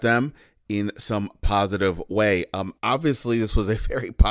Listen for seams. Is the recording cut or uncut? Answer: cut